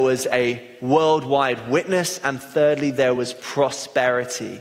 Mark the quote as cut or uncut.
uncut